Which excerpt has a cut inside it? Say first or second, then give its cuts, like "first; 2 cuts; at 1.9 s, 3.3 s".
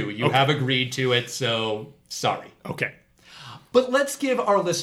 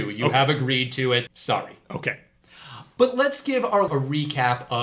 second; 2 cuts; at 1.3 s, 3.9 s